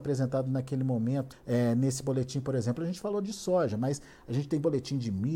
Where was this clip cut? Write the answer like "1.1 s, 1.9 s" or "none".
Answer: 1.3 s